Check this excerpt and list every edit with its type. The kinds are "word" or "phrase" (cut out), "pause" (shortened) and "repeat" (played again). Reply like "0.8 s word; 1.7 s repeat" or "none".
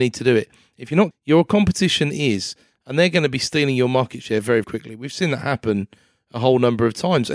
1.1 s phrase; 4.6 s word